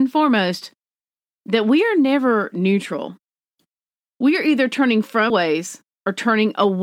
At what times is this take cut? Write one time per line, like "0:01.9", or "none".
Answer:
0:05.3